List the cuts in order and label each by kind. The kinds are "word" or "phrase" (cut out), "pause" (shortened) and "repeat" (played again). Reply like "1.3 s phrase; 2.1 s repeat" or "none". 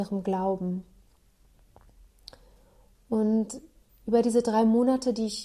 none